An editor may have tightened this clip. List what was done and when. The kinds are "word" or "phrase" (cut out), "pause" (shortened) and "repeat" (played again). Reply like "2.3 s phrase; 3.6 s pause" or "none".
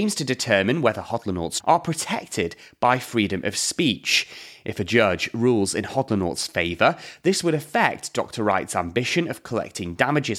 1.6 s word